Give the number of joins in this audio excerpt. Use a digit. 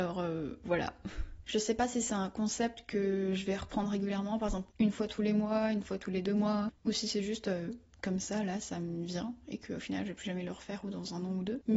1